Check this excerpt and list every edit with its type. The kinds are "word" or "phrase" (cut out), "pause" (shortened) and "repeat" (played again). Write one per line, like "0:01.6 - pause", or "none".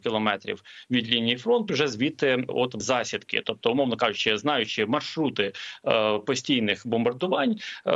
0:01.7 - word
0:02.5 - word
0:02.8 - word